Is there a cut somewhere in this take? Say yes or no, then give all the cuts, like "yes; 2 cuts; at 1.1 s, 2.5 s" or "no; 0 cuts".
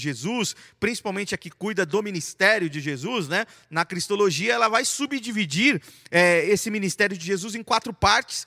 no; 0 cuts